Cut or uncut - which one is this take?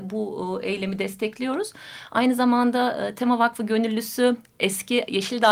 uncut